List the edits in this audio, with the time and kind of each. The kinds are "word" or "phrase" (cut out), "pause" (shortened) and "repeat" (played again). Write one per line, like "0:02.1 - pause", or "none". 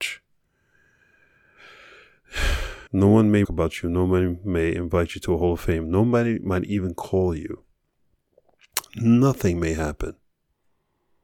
0:02.9 - pause
0:03.4 - phrase